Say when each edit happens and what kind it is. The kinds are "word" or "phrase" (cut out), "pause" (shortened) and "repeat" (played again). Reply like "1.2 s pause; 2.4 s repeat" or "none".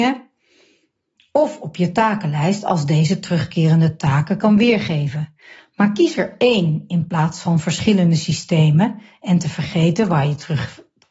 none